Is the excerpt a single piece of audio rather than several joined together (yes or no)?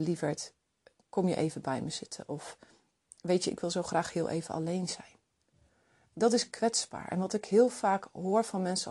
yes